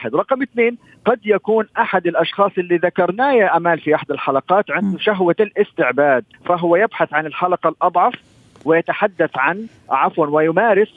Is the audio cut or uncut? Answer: cut